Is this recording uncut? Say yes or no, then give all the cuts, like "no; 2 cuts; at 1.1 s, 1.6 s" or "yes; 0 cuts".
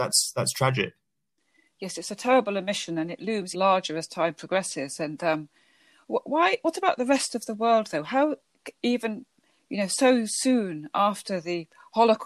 no; 1 cut; at 3.5 s